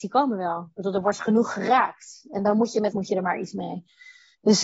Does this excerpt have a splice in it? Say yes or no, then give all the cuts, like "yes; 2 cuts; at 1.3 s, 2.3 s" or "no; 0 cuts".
yes; 1 cut; at 2.9 s